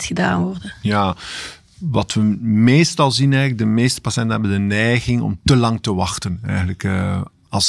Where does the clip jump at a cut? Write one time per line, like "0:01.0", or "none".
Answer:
none